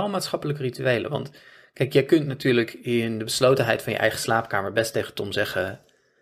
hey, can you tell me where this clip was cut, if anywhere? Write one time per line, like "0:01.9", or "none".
none